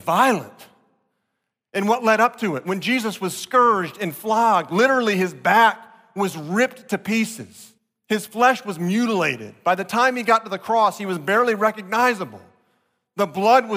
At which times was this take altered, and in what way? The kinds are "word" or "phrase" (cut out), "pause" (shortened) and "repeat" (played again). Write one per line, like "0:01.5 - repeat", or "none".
0:07.8 - pause